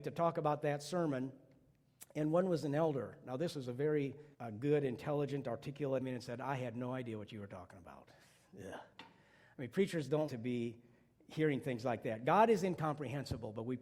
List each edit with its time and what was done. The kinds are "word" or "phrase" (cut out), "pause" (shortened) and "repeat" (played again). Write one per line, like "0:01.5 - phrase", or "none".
0:04.3 - pause
0:06.0 - phrase
0:10.3 - word